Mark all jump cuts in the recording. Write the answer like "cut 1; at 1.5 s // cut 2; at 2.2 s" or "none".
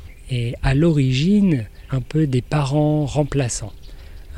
cut 1; at 1.9 s

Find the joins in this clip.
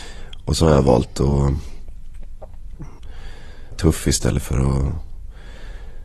cut 1; at 3.7 s

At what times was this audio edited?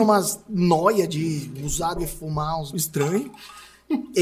cut 1; at 2.0 s // cut 2; at 2.7 s

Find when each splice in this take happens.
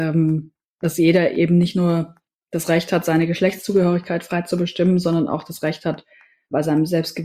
none

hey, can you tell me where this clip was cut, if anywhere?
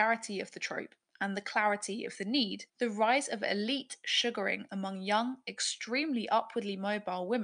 cut 1; at 2.7 s

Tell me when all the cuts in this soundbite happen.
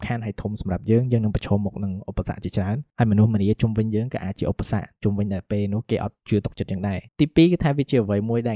cut 1; at 7.1 s

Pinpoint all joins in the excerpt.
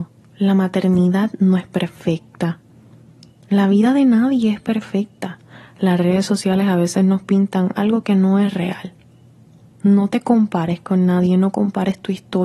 none

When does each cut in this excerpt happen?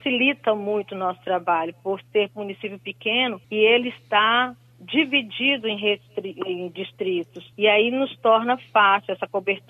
cut 1; at 3.4 s // cut 2; at 7.5 s

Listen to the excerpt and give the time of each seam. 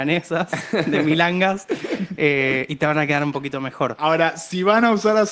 none

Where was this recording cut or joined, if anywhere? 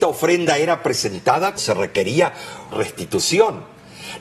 cut 1; at 1.6 s // cut 2; at 2.7 s

